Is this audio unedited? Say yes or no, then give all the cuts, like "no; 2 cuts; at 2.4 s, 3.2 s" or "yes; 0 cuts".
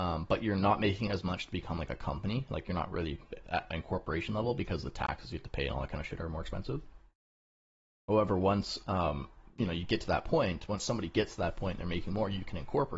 yes; 0 cuts